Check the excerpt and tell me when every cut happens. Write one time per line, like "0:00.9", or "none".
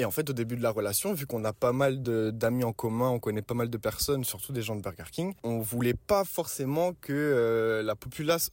none